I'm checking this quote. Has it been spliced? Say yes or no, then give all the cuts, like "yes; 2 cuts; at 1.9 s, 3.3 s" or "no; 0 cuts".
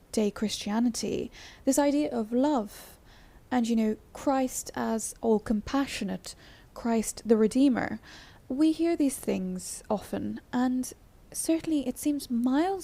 no; 0 cuts